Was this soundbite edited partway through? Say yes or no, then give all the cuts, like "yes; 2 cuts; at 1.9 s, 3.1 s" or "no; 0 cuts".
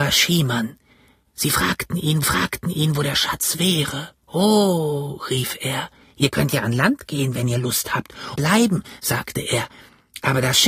yes; 4 cuts; at 2.2 s, 4.2 s, 6.0 s, 8.4 s